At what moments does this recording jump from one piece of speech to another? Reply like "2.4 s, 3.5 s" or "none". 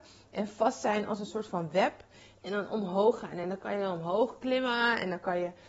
none